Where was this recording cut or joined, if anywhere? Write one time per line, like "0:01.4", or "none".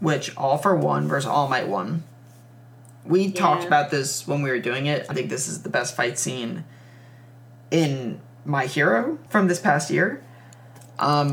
0:05.1
0:09.3